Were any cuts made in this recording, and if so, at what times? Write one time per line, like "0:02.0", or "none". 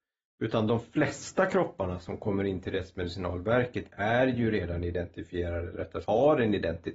0:06.0